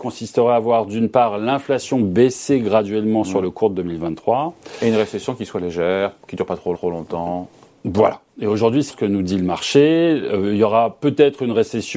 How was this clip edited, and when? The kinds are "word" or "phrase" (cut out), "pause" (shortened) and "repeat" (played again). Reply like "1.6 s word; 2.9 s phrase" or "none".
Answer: 6.2 s pause; 6.7 s repeat; 8.9 s word